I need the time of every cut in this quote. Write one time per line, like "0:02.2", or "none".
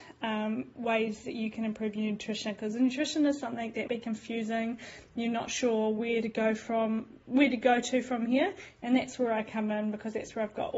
0:03.9